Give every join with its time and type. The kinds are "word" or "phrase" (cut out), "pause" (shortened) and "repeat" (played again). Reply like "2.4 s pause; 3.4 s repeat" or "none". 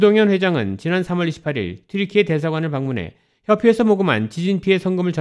none